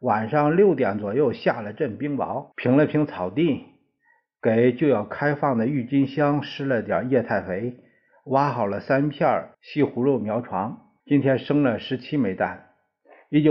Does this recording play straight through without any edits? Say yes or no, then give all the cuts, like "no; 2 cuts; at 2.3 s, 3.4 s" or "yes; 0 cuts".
no; 3 cuts; at 2.5 s, 9.5 s, 11.0 s